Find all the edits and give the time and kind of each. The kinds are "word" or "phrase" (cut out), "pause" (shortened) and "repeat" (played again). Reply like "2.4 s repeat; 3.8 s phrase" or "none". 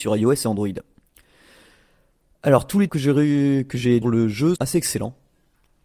2.9 s word; 4.0 s phrase; 4.6 s word